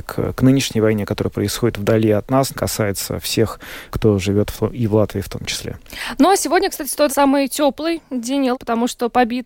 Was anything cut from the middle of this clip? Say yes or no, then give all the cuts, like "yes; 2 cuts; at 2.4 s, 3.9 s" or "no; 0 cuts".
yes; 4 cuts; at 2.5 s, 3.9 s, 7.1 s, 8.5 s